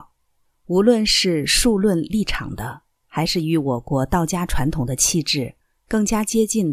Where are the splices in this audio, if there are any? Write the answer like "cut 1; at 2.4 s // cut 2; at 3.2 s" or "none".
none